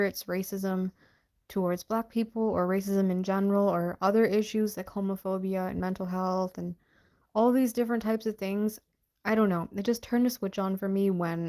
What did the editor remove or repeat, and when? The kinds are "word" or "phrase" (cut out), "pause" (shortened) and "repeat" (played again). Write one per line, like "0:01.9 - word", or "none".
none